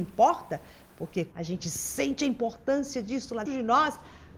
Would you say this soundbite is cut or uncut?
cut